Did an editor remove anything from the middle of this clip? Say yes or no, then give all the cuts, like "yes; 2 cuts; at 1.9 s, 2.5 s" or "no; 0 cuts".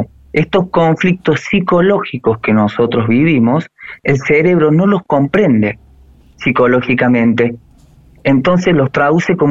no; 0 cuts